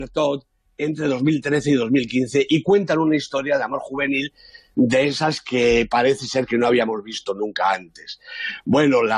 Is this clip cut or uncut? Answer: uncut